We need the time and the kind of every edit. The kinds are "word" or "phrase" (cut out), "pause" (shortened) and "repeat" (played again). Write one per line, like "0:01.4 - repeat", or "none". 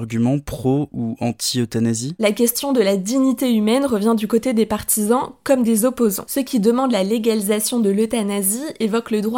none